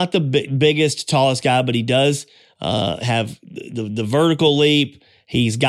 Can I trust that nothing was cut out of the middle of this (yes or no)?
yes